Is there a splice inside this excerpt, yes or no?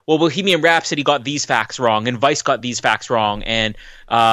no